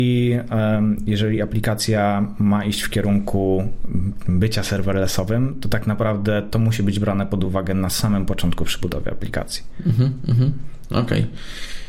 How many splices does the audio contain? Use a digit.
0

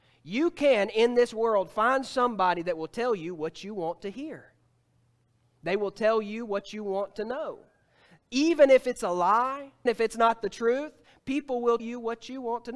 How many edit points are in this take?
2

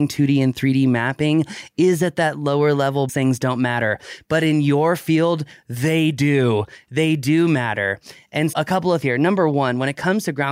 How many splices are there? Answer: 3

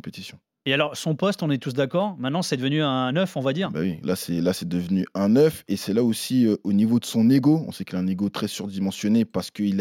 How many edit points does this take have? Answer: 0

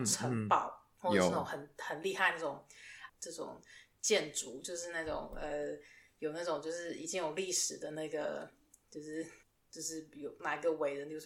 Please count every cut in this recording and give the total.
3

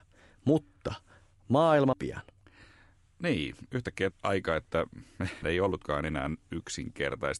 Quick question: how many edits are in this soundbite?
4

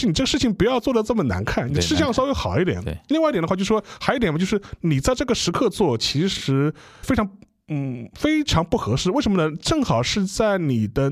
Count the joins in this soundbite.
1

